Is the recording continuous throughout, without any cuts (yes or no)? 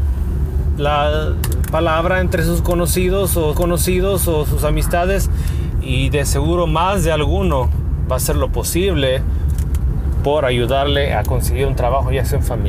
no